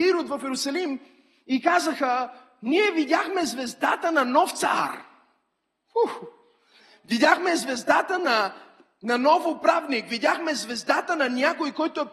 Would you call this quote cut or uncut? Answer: uncut